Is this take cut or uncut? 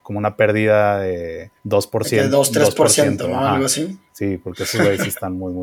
cut